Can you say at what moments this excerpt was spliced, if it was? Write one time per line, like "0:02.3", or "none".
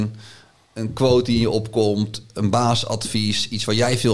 none